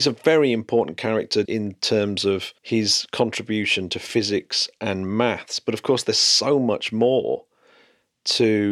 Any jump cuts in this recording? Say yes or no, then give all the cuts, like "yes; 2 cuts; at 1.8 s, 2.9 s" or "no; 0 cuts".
yes; 2 cuts; at 1.4 s, 2.6 s